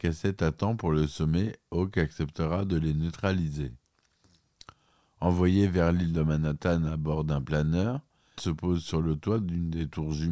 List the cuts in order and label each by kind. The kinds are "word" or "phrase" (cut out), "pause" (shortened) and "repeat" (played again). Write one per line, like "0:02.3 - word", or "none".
0:08.4 - word